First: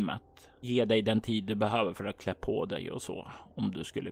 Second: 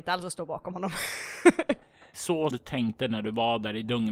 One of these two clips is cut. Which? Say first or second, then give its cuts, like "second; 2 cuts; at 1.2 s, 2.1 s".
second; 2 cuts; at 2.1 s, 2.5 s